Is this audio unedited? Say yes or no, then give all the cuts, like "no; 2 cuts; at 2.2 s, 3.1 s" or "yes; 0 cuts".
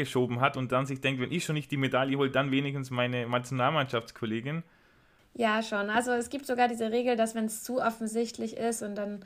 yes; 0 cuts